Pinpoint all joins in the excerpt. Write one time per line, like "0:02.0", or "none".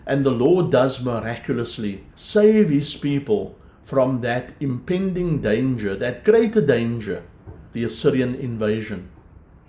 0:02.1
0:07.7